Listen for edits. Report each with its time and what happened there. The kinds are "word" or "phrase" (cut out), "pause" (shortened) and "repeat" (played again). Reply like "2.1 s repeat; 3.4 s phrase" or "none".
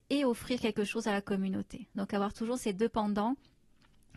none